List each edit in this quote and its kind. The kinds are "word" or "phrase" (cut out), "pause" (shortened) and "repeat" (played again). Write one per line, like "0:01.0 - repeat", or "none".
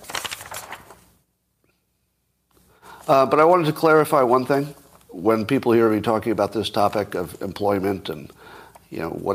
none